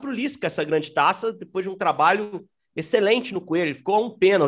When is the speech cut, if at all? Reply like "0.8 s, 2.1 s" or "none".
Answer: none